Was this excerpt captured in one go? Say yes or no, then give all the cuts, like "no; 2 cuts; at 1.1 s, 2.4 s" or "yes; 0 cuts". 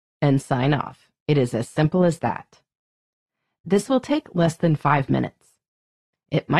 no; 1 cut; at 1.2 s